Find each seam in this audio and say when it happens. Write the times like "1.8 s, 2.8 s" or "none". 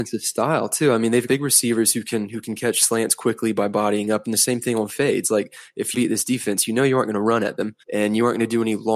1.3 s, 5.9 s, 7.8 s